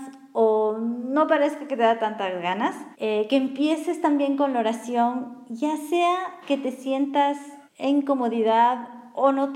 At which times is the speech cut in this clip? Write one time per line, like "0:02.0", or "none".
0:02.9
0:07.7